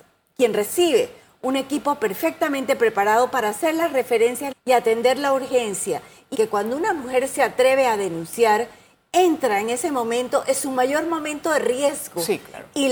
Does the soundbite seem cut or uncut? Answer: cut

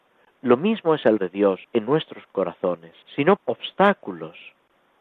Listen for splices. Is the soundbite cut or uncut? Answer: cut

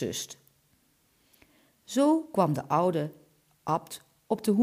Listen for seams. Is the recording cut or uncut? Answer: uncut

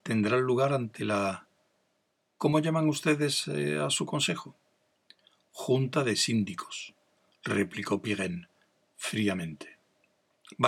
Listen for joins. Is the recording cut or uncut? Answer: uncut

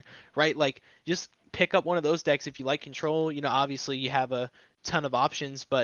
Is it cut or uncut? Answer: uncut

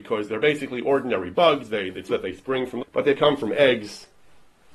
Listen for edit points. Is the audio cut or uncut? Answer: cut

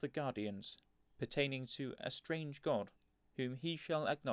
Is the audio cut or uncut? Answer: cut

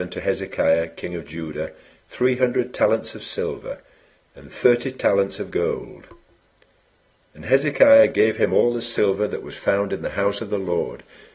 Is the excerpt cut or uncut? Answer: uncut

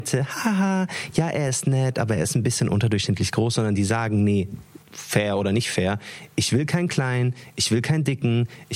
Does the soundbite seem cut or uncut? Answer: cut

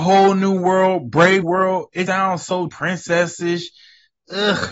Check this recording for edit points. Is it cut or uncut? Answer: cut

